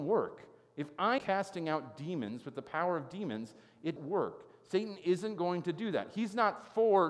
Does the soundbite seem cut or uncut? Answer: cut